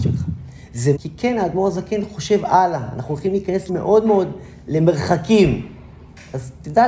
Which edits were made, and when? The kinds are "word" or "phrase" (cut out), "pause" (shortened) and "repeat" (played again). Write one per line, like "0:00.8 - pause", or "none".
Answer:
0:01.0 - word
0:03.7 - word